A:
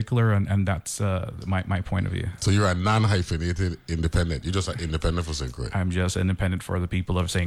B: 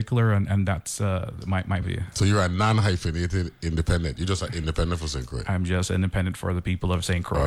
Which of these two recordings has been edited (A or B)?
B